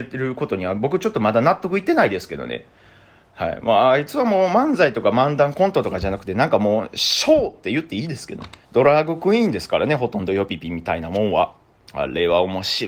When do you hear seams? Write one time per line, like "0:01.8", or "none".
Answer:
0:08.6